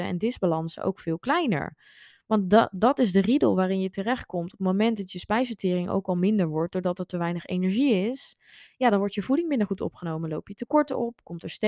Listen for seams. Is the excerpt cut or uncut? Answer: uncut